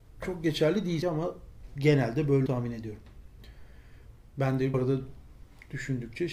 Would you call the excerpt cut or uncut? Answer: cut